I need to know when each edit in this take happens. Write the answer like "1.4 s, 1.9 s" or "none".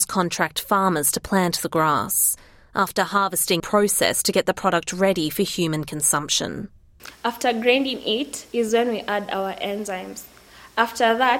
3.6 s